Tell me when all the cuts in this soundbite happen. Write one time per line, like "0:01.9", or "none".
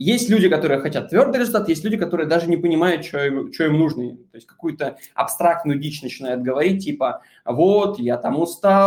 none